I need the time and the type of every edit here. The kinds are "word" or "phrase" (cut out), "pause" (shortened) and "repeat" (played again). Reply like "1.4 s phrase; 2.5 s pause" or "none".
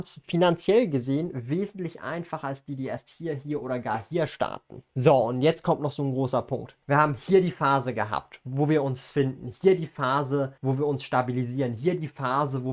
4.9 s pause; 6.8 s pause; 10.6 s pause